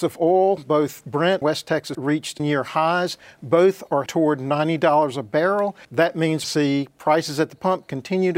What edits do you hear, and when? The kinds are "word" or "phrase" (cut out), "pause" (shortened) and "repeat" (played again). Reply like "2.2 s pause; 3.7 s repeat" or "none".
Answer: 1.4 s word; 1.9 s word; 2.4 s word; 4.1 s word; 5.8 s pause; 6.4 s phrase